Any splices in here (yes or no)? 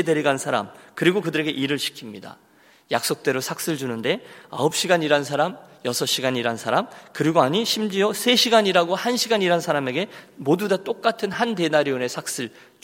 no